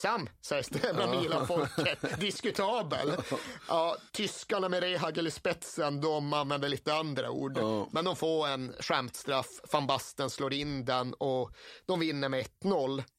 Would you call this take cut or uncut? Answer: cut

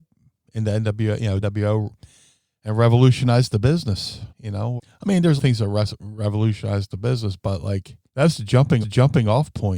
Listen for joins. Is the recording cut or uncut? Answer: cut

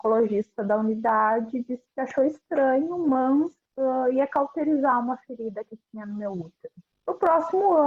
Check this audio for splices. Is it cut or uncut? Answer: uncut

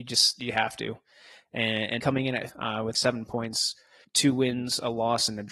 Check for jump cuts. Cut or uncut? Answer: cut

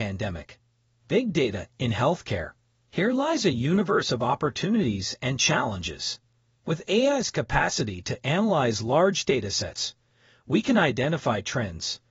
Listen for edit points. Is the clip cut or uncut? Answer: uncut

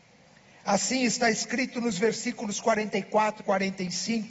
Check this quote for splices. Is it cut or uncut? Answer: cut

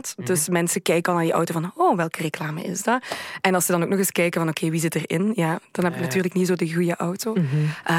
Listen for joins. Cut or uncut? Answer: uncut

